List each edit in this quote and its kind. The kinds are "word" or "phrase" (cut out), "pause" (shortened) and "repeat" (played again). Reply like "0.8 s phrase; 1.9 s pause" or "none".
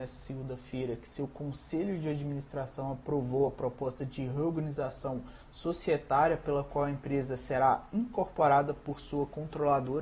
none